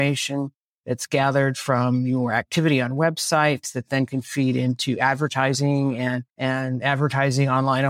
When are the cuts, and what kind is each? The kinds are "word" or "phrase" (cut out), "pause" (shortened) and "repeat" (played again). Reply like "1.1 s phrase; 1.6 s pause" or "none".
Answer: 6.3 s pause